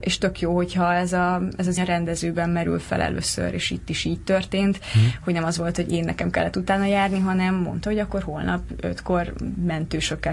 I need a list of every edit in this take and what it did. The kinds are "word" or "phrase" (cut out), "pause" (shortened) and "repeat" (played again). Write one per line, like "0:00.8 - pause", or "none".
0:01.8 - word